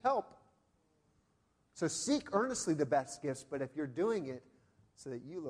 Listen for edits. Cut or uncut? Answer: uncut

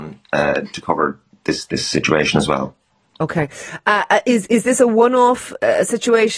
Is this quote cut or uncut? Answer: uncut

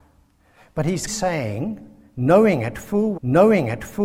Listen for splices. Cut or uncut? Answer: cut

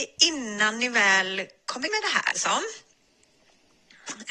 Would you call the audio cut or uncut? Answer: cut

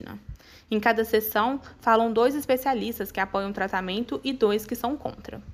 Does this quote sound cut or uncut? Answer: uncut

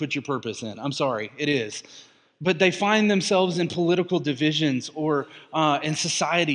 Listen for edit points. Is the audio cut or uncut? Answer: uncut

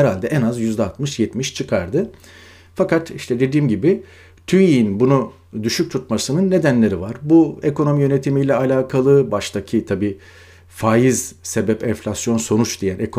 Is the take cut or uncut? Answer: uncut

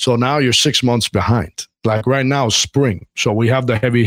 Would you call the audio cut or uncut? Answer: uncut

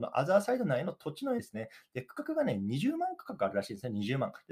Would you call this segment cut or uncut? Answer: cut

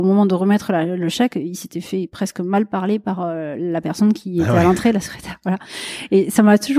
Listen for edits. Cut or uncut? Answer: uncut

